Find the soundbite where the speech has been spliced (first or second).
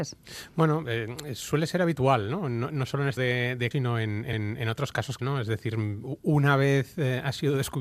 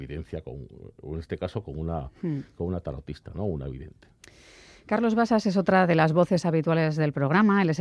first